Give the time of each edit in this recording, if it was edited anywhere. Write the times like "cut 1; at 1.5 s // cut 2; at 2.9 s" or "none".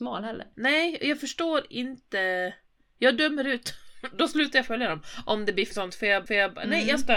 cut 1; at 5.7 s // cut 2; at 6.3 s

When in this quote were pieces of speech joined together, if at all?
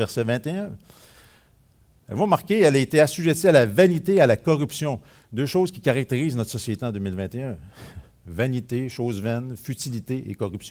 none

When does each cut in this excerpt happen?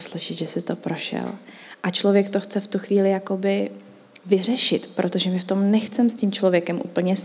none

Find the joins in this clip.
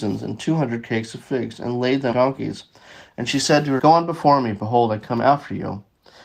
cut 1; at 2.1 s // cut 2; at 3.8 s

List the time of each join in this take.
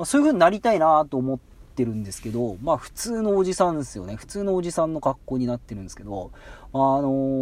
none

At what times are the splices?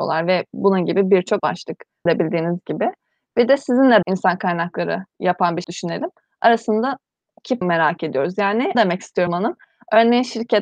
cut 1; at 1.4 s // cut 2; at 2.1 s // cut 3; at 4.0 s // cut 4; at 5.6 s // cut 5; at 7.6 s // cut 6; at 8.7 s // cut 7; at 9.3 s

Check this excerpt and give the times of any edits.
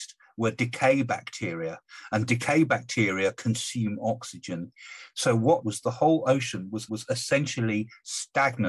cut 1; at 5.6 s // cut 2; at 6.9 s

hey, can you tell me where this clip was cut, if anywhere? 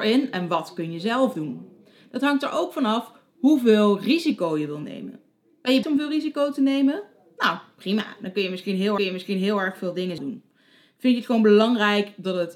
cut 1; at 5.8 s // cut 2; at 9.0 s // cut 3; at 10.2 s

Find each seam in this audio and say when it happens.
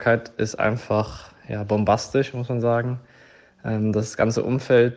none

